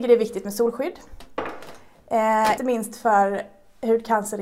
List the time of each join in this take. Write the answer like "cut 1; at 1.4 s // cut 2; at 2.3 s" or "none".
cut 1; at 2.6 s